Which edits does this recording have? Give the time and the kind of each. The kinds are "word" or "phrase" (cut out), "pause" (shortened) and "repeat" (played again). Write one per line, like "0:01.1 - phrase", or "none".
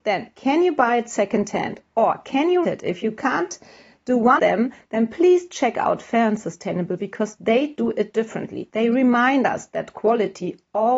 0:02.6 - word
0:04.4 - word
0:07.0 - word